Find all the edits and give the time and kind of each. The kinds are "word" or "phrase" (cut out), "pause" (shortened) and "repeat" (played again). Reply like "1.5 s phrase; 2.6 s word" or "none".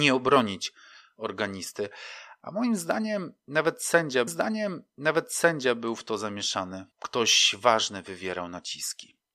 4.3 s repeat; 6.9 s pause

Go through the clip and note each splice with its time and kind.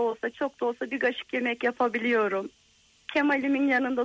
none

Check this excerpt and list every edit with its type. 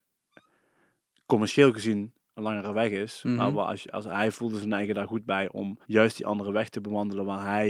5.8 s pause

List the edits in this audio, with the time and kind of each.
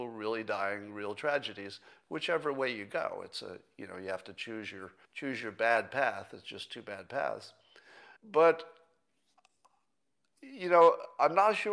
5.0 s pause; 8.2 s pause

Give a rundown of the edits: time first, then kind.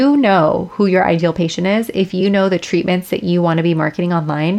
none

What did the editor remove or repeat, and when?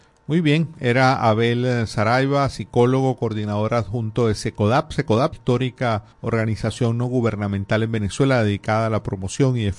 5.3 s phrase; 6.1 s pause

